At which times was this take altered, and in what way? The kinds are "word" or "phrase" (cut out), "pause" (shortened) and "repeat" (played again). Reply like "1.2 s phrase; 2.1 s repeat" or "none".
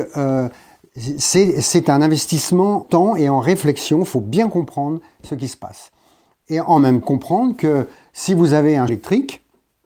2.8 s word; 7.0 s word; 8.9 s word